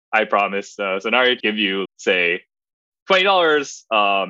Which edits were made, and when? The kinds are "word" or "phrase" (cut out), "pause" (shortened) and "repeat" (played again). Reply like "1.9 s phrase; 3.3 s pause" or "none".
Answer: 1.4 s word; 1.8 s word